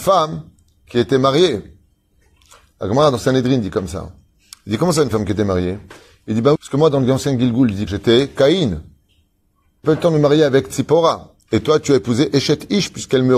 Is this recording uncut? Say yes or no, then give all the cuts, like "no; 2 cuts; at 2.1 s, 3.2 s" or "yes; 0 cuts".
no; 3 cuts; at 6.6 s, 7.9 s, 9.8 s